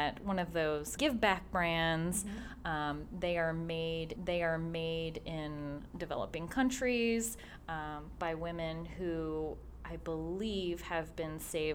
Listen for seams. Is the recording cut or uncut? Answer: cut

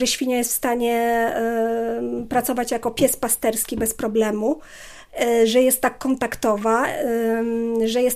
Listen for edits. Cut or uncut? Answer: uncut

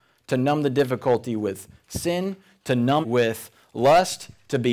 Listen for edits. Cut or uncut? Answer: cut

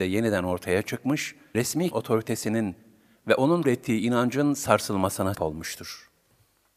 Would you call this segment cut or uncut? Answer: cut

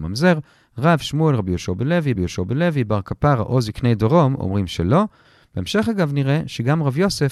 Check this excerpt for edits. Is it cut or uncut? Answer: cut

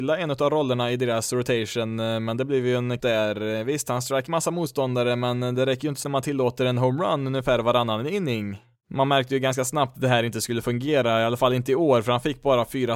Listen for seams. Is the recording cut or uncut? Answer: cut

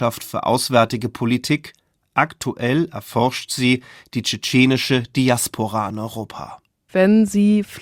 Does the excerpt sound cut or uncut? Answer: uncut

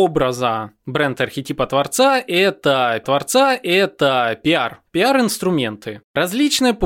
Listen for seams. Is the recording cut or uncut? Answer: cut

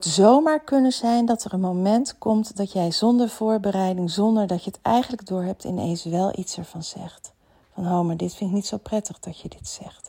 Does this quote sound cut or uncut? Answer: uncut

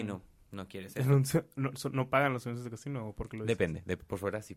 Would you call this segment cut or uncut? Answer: uncut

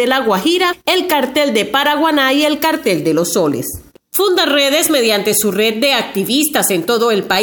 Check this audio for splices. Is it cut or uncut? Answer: uncut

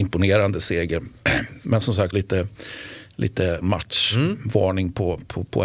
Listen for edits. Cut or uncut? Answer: cut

